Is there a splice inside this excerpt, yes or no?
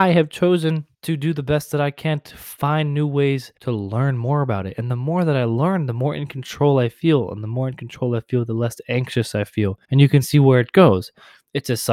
yes